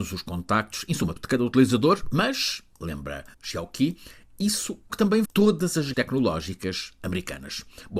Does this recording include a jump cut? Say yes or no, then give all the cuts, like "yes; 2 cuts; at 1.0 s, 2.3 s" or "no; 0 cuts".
yes; 5 cuts; at 1.2 s, 3.3 s, 4.9 s, 5.2 s, 5.9 s